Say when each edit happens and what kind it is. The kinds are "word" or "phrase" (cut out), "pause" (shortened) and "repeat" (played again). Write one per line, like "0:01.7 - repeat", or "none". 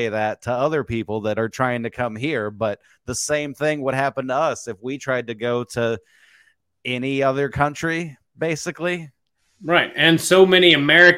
none